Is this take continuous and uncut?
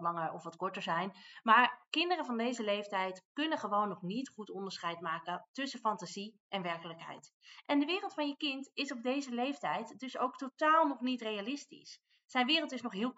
yes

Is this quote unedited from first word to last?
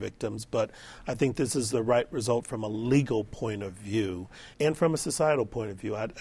no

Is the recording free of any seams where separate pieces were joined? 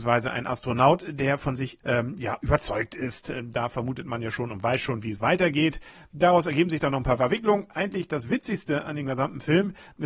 no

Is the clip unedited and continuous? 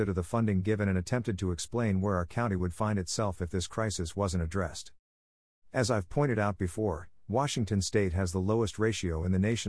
yes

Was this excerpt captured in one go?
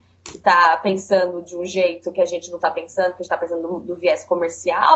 yes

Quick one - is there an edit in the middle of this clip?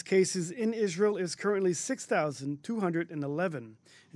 no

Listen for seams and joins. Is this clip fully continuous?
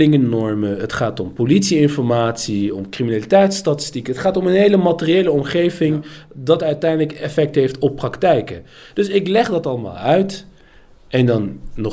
yes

